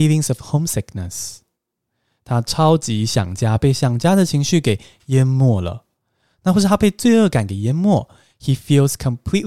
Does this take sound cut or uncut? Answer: uncut